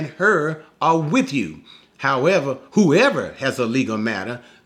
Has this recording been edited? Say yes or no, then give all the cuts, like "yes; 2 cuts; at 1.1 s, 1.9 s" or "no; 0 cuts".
no; 0 cuts